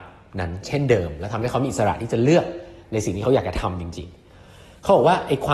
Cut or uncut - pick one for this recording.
uncut